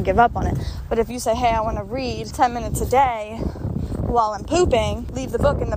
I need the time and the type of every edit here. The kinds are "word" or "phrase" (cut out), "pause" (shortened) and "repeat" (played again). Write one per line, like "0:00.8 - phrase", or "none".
none